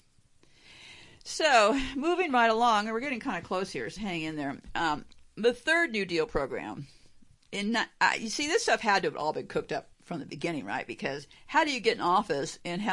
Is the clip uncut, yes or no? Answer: no